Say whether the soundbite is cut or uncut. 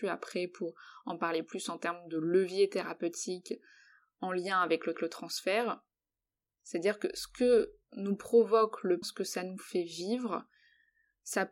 cut